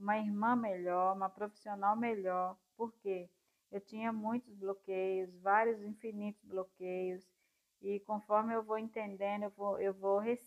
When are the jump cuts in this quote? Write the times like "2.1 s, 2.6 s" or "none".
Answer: none